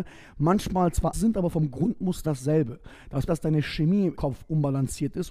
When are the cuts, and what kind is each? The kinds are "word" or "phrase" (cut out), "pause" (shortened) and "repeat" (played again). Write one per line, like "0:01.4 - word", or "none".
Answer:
0:01.1 - word
0:02.2 - word
0:03.3 - word
0:04.1 - word